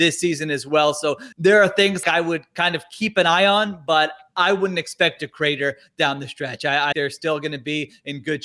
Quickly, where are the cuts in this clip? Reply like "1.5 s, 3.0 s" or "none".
1.3 s, 2.0 s, 5.2 s, 6.9 s